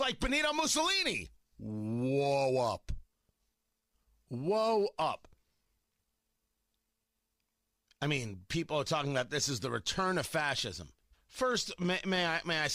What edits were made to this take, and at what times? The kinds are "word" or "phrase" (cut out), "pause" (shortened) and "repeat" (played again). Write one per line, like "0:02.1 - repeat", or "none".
0:11.1 - pause